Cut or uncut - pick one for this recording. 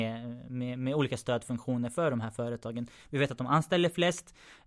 uncut